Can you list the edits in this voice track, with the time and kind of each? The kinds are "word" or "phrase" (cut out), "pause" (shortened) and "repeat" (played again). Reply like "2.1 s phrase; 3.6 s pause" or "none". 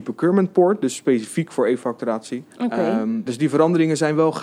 2.5 s pause; 3.3 s word